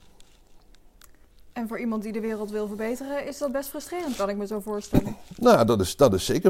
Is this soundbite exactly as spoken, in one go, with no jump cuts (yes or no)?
yes